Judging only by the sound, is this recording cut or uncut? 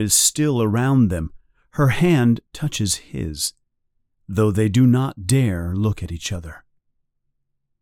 uncut